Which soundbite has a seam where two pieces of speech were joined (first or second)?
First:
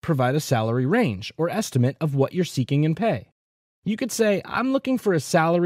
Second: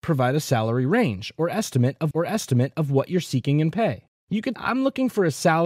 second